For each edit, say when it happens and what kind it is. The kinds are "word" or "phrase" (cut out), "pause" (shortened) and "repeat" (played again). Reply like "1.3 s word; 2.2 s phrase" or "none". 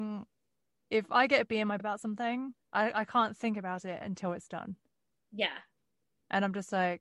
1.8 s word; 2.6 s pause